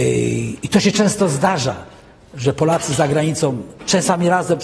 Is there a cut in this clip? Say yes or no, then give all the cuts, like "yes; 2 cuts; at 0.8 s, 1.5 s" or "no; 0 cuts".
no; 0 cuts